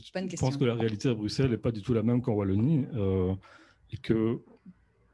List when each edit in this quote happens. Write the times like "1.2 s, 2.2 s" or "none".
none